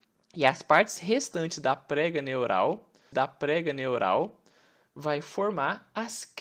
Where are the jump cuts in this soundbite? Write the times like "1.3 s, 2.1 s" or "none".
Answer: 3.1 s